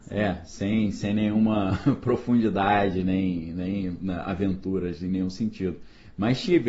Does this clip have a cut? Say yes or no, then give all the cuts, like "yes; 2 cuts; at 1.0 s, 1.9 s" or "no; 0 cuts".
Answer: no; 0 cuts